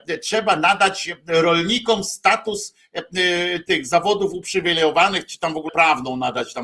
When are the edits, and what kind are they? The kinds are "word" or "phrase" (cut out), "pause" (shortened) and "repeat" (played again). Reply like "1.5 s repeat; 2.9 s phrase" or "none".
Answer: 5.7 s word

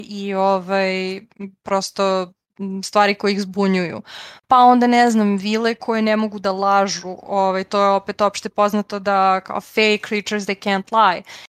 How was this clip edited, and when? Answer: none

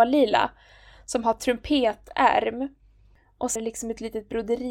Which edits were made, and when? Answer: 3.6 s word

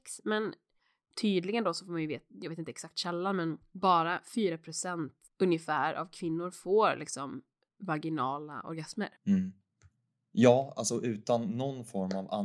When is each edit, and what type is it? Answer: 9.2 s pause

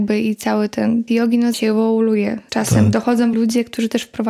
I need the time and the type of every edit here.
1.1 s phrase; 1.5 s word; 2.5 s word; 3.3 s word

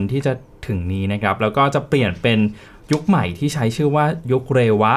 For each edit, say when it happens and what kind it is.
none

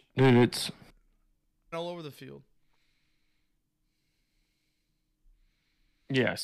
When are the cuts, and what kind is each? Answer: 1.7 s phrase

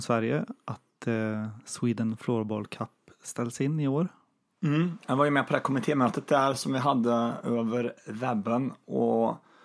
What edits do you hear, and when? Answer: none

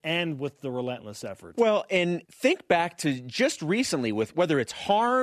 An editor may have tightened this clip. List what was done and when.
2.2 s pause

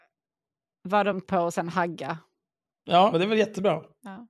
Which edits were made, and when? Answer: 1.2 s word; 3.1 s word

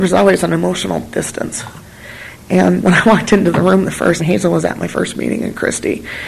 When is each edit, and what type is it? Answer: 2.8 s word; 4.2 s word

